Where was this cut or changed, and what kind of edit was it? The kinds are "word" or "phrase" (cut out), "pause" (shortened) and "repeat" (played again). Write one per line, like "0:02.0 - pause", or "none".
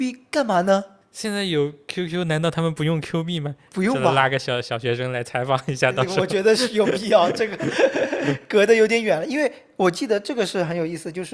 none